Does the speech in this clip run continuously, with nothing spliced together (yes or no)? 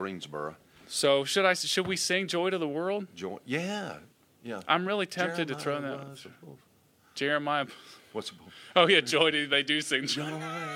yes